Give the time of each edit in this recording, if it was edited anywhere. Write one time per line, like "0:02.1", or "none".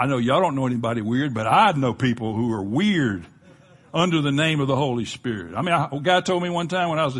none